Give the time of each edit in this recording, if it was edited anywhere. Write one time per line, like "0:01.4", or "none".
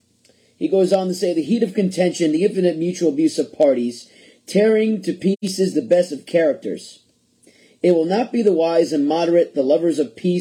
none